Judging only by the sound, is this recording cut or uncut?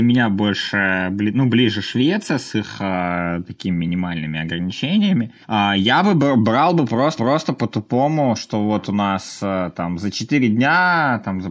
cut